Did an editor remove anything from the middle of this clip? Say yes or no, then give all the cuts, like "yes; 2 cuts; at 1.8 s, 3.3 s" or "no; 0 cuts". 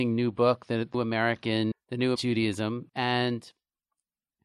yes; 3 cuts; at 0.9 s, 1.7 s, 2.2 s